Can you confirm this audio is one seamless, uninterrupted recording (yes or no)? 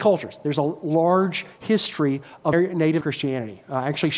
no